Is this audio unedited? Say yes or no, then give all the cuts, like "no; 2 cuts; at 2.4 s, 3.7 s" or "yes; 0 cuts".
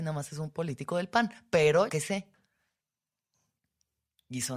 no; 1 cut; at 1.9 s